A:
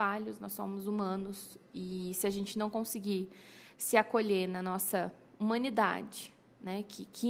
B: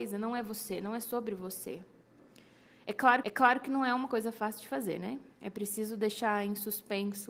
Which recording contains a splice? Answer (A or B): B